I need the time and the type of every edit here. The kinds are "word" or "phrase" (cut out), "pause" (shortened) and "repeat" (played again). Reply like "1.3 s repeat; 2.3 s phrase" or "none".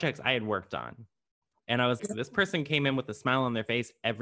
1.5 s pause; 2.0 s word